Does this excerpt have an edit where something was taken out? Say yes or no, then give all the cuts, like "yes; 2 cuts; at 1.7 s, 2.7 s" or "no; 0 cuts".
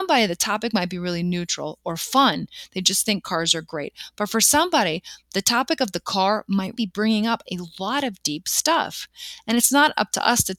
yes; 1 cut; at 6.7 s